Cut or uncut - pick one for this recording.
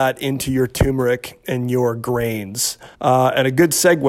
cut